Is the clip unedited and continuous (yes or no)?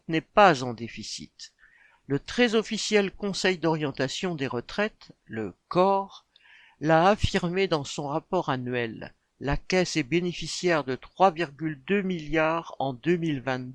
yes